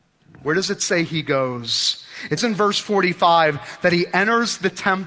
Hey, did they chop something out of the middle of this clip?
yes; 1 cut; at 2.4 s

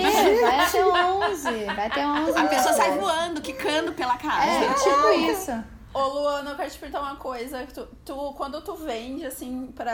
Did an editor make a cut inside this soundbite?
no; 0 cuts

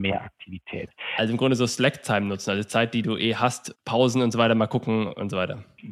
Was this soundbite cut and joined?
no; 0 cuts

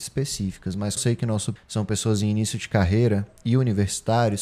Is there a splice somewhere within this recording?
yes; 2 cuts; at 1.0 s, 1.6 s

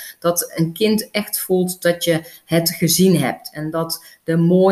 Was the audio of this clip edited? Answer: no; 0 cuts

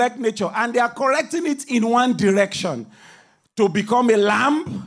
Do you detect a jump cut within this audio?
no; 0 cuts

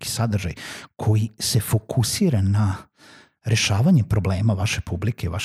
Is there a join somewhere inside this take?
no; 0 cuts

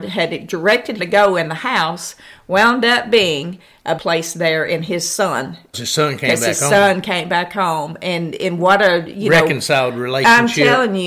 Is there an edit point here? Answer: yes; 3 cuts; at 1.0 s, 4.0 s, 5.7 s

